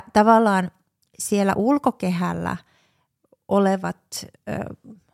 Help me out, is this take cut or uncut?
uncut